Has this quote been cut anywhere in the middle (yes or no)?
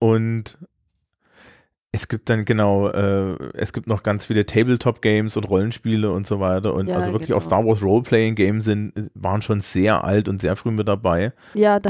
no